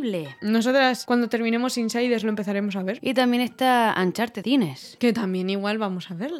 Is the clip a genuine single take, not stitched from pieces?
no; 1 cut; at 4.4 s

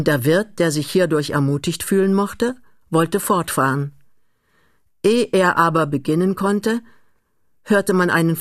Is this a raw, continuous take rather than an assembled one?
yes; 0 cuts

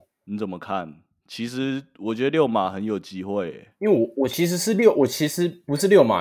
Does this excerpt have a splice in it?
no; 0 cuts

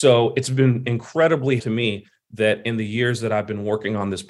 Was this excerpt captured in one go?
no; 1 cut; at 1.6 s

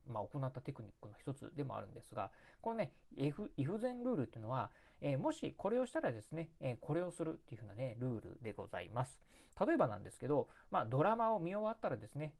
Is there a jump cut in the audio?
no; 0 cuts

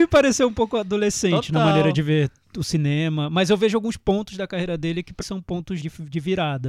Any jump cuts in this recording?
yes; 2 cuts; at 5.2 s, 5.8 s

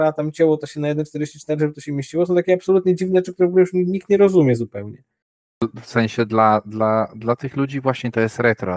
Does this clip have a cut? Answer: yes; 1 cut; at 5.2 s

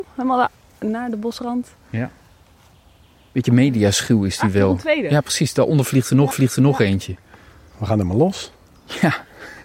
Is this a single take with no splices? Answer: no; 1 cut; at 6.3 s

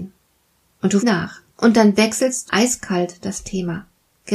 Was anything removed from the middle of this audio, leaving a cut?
yes; 3 cuts; at 1.0 s, 1.5 s, 2.5 s

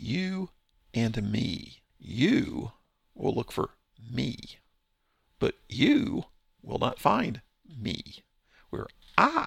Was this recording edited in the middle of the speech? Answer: yes; 1 cut; at 1.9 s

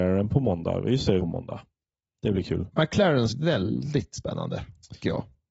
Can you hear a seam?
yes; 2 cuts; at 1.2 s, 3.3 s

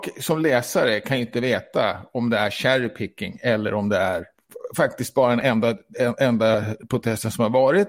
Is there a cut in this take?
no; 0 cuts

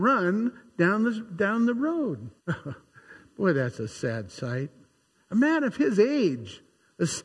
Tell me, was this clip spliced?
yes; 1 cut; at 2.4 s

